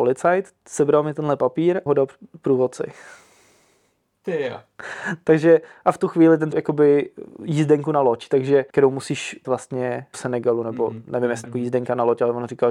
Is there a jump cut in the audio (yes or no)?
yes